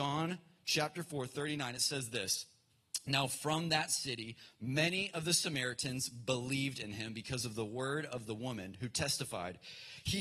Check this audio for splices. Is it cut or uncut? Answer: uncut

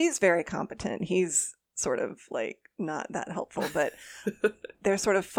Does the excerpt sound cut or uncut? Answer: uncut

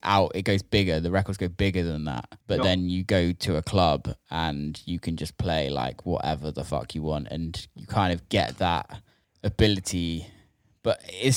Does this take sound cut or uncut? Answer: cut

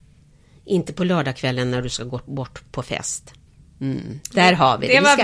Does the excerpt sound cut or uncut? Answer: cut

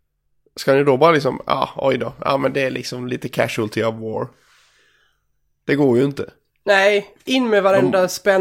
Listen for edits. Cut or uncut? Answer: uncut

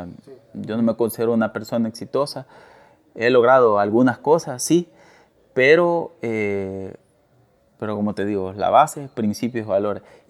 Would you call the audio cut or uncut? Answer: uncut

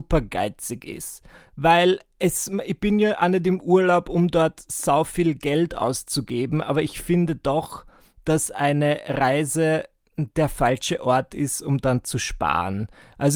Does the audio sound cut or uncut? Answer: uncut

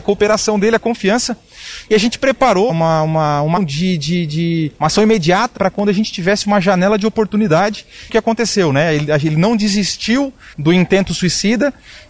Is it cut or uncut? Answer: cut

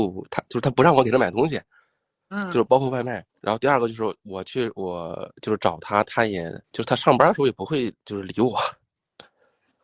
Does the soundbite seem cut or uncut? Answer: cut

